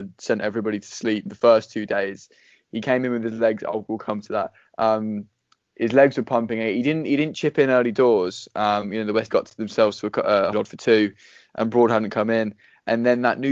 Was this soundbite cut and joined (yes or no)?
yes